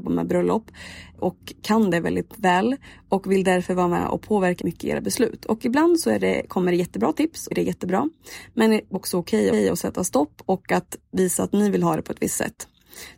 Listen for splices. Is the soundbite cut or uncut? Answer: cut